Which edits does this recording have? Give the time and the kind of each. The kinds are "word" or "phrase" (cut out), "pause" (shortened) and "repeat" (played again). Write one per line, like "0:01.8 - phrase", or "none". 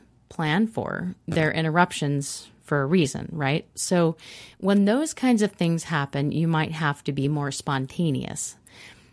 none